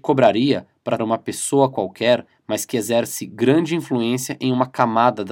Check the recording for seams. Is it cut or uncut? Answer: cut